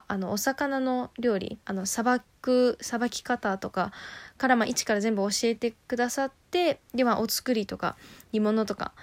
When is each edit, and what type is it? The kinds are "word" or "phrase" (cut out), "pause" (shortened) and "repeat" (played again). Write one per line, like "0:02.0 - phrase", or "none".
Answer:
0:01.6 - pause